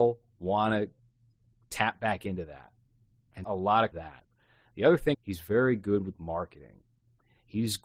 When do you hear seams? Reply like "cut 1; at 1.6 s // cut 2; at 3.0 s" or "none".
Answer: cut 1; at 3.4 s // cut 2; at 3.9 s // cut 3; at 5.1 s